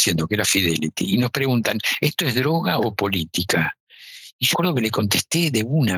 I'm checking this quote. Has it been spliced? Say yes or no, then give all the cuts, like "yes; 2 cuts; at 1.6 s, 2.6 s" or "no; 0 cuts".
yes; 1 cut; at 4.5 s